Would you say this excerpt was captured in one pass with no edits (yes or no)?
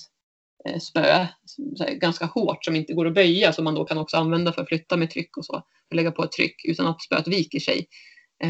yes